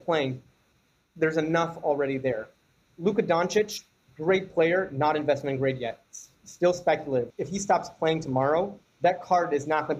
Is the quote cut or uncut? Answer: uncut